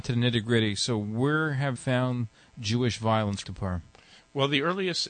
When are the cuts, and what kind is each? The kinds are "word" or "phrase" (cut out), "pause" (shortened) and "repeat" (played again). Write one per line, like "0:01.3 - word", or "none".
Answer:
0:01.8 - word
0:03.4 - word